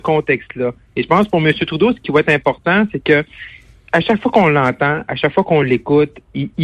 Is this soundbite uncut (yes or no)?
yes